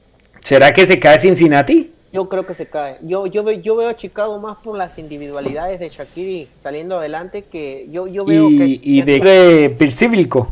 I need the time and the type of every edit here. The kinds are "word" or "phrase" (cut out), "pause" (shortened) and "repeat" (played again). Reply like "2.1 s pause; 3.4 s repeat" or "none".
6.5 s pause; 9.2 s word